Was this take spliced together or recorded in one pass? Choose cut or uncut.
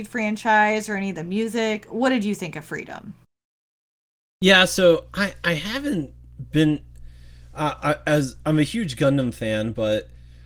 uncut